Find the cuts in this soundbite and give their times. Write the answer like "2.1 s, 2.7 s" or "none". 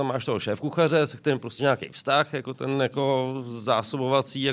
1.6 s